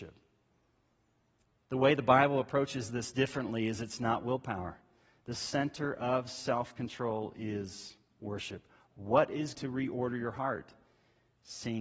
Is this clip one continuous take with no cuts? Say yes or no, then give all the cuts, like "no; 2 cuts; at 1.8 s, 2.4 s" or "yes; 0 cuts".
no; 1 cut; at 9.6 s